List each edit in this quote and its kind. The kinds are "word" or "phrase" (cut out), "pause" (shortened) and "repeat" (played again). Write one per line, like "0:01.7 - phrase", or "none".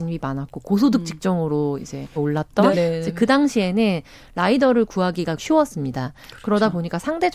0:02.2 - word
0:02.7 - word
0:05.4 - word